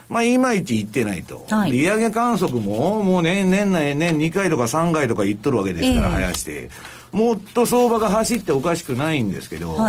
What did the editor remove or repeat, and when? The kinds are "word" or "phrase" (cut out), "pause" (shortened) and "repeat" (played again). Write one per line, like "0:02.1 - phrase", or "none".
0:01.7 - word